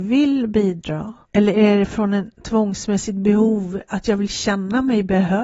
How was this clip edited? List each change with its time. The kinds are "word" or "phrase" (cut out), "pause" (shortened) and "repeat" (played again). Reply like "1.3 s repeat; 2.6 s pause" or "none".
1.2 s pause; 2.3 s pause